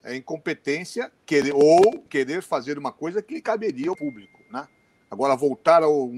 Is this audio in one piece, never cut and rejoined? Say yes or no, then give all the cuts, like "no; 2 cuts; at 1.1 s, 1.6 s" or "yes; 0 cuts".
no; 3 cuts; at 1.2 s, 2.1 s, 4.0 s